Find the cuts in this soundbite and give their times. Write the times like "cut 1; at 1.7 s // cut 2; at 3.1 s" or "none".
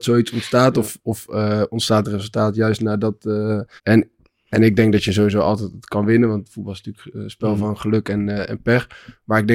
cut 1; at 3.8 s